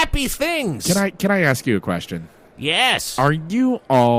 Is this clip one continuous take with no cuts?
yes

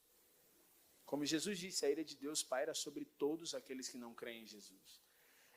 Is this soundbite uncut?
yes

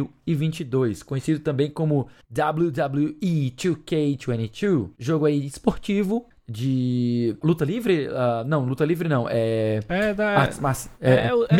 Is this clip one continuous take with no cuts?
no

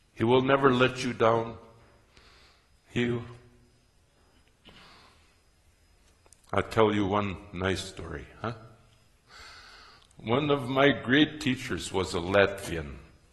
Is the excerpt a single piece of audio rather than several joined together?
no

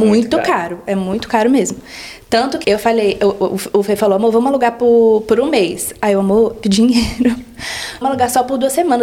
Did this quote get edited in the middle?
yes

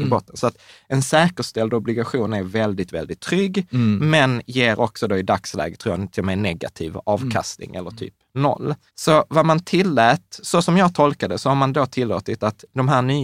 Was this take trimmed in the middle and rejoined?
yes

